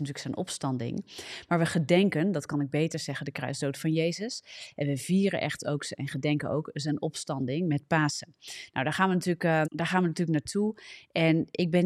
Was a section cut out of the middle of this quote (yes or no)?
yes